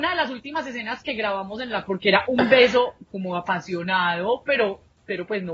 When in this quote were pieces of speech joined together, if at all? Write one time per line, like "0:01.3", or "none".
0:01.9